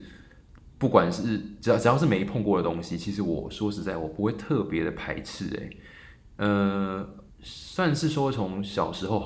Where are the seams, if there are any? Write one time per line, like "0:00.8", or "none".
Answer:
0:07.3